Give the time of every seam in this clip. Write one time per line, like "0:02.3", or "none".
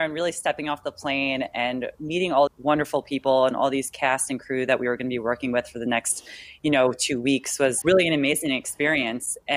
0:02.5
0:07.8